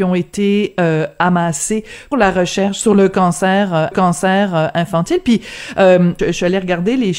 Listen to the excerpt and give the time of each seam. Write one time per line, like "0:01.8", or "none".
0:02.1
0:03.9
0:06.2